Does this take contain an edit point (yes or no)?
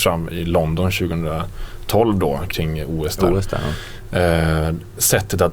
no